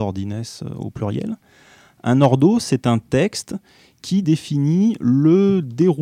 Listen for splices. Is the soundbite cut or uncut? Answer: uncut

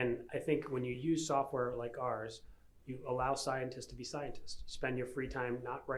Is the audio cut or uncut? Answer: uncut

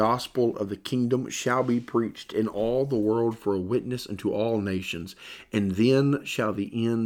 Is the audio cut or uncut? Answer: uncut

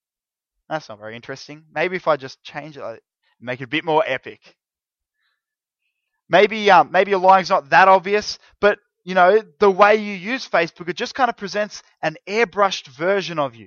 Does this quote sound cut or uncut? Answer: uncut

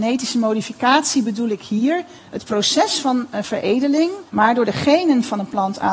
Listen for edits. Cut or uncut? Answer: cut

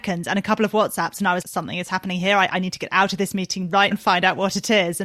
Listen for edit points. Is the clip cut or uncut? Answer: cut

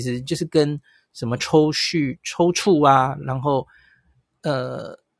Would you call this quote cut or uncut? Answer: uncut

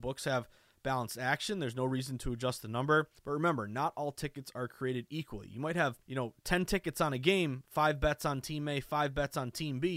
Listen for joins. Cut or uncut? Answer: cut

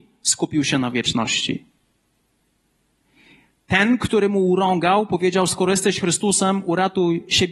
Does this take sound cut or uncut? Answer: uncut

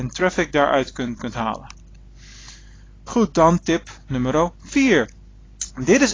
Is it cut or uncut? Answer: cut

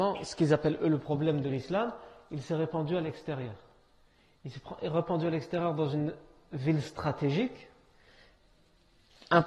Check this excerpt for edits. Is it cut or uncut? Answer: uncut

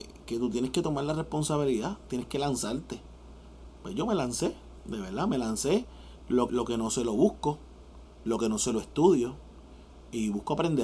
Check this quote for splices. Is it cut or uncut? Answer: cut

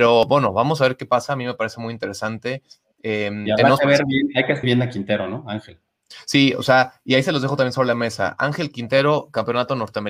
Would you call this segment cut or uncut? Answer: cut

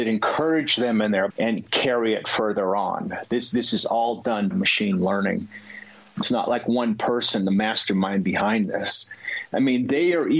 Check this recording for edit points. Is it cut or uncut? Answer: cut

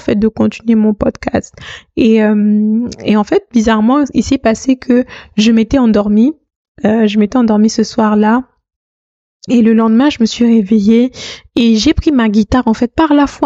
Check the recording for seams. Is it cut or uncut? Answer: uncut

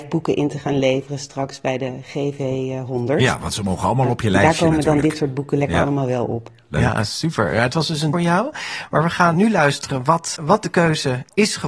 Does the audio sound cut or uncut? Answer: cut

